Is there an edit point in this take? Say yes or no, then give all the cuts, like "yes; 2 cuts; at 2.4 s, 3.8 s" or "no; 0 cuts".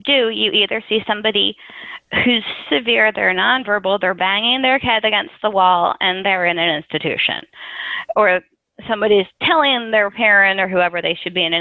yes; 1 cut; at 2.7 s